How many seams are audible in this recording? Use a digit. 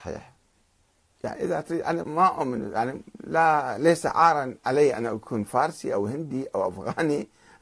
1